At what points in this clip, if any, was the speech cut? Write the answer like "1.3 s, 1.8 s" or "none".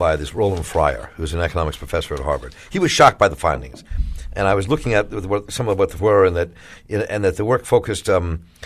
6.0 s